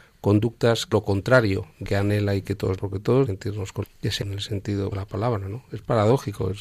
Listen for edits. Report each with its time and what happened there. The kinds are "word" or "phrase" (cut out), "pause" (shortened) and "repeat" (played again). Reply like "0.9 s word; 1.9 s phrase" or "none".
0.9 s word; 1.8 s word; 2.8 s word; 3.3 s word; 3.8 s word; 4.2 s word; 4.9 s word

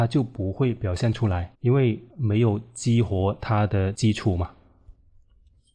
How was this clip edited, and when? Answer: 1.5 s pause; 2.1 s pause

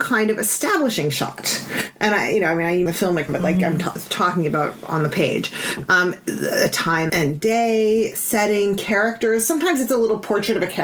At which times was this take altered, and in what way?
2.9 s word; 3.3 s word; 7.1 s word

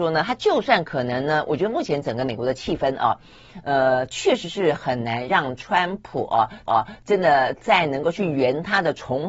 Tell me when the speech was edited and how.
6.7 s repeat

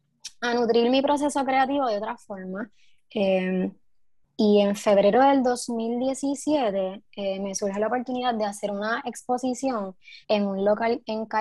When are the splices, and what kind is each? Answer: 10.2 s pause

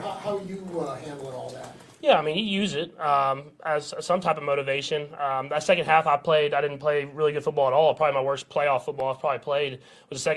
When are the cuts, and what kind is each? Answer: none

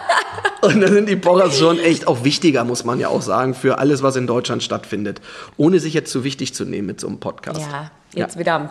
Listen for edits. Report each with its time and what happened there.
none

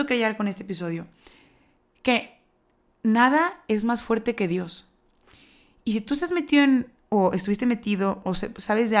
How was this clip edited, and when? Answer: none

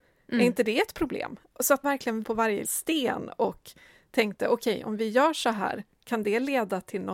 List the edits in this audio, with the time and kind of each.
1.8 s word; 2.2 s word; 2.6 s word

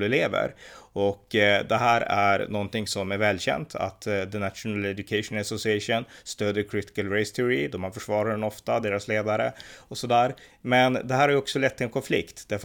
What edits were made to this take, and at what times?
none

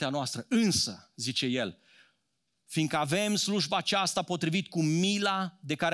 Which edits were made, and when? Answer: none

